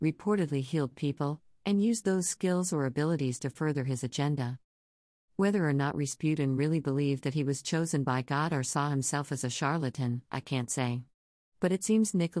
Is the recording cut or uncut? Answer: uncut